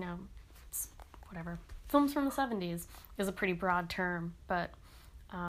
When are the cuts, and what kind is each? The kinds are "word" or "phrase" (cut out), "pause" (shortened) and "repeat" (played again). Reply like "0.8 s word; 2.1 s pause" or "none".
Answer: none

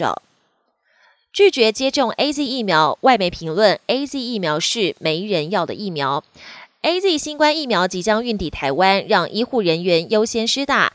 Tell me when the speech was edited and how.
none

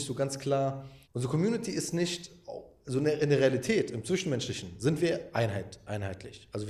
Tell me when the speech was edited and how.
1.0 s pause

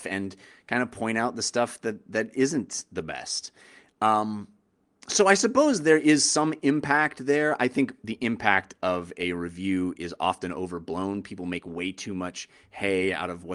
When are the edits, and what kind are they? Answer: none

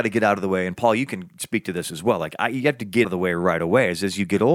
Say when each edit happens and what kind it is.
3.0 s word

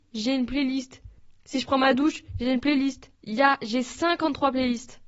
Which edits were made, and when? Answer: 1.4 s pause; 3.1 s pause

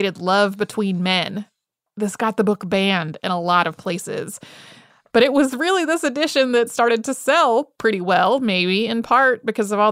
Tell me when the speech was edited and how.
none

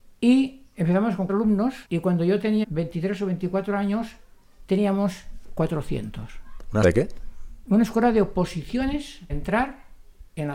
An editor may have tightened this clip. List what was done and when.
1.3 s word; 1.8 s pause; 2.6 s word; 6.8 s word; 9.3 s word

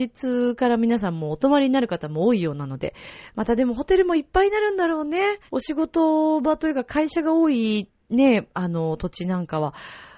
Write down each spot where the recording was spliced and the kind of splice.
5.5 s pause

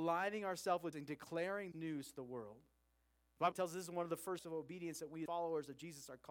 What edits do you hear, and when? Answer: 0.9 s word; 1.7 s word; 3.5 s word; 4.4 s word; 5.3 s word

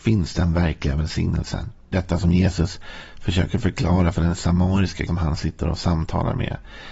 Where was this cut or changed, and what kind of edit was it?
1.9 s word; 5.1 s word

